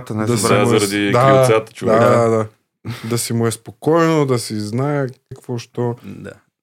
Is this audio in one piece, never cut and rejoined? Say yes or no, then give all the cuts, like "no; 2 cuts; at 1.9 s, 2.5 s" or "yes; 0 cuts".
no; 1 cut; at 5.3 s